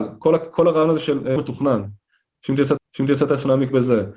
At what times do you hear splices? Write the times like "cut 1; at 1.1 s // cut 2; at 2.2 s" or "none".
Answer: cut 1; at 1.4 s // cut 2; at 2.8 s